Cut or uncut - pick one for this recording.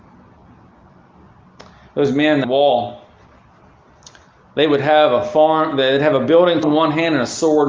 cut